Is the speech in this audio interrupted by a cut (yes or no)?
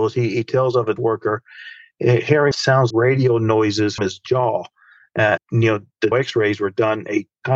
yes